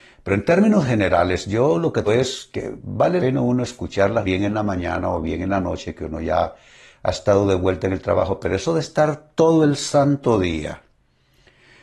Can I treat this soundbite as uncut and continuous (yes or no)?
no